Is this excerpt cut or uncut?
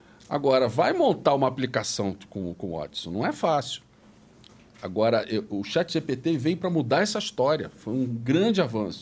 uncut